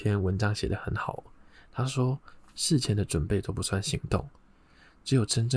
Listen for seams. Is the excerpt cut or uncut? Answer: uncut